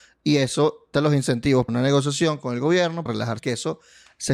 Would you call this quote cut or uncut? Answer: cut